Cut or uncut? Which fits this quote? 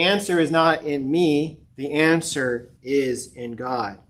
cut